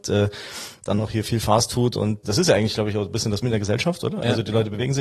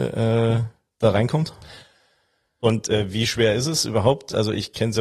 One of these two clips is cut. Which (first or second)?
first